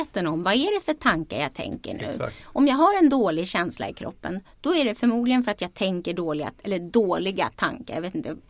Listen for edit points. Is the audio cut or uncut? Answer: uncut